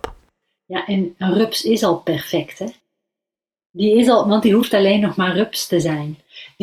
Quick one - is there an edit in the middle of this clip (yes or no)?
no